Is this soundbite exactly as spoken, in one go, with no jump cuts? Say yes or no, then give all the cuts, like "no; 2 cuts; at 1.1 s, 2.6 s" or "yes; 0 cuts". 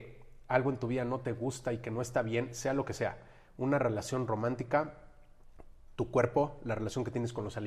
yes; 0 cuts